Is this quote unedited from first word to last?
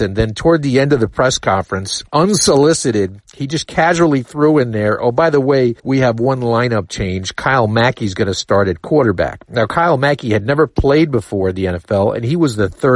no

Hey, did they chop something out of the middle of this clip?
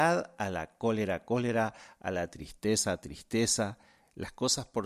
no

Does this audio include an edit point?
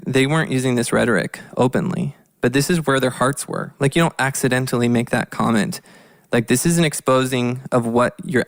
no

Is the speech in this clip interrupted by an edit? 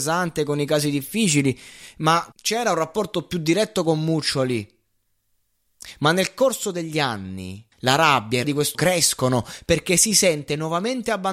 yes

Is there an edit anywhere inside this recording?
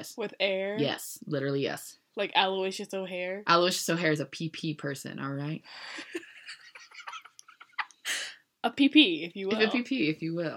no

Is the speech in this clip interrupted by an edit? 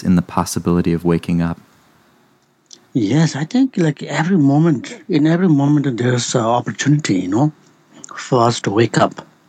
no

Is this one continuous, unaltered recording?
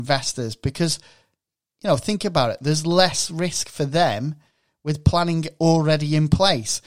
yes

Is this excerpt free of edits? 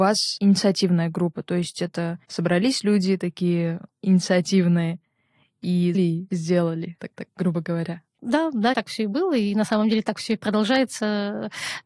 no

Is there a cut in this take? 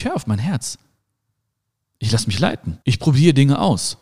yes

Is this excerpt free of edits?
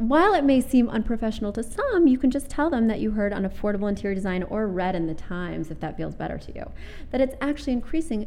yes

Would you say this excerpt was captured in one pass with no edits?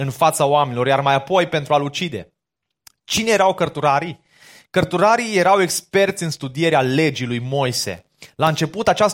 yes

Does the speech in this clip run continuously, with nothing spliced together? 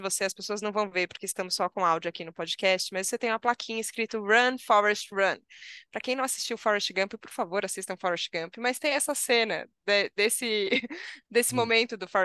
yes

